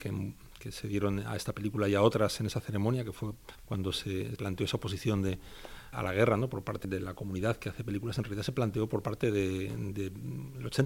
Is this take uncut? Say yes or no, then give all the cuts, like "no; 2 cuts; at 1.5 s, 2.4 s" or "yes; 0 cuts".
no; 5 cuts; at 3.5 s, 4.4 s, 5.9 s, 6.8 s, 9.9 s